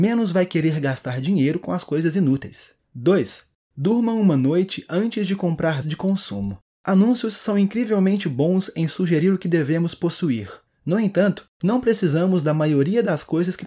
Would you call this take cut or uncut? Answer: cut